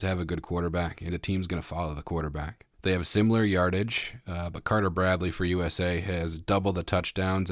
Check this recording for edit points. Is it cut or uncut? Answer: cut